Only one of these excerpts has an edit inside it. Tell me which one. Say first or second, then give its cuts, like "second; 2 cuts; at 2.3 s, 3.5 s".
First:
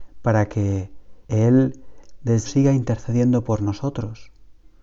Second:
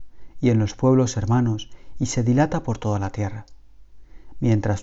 first; 2 cuts; at 1.2 s, 2.5 s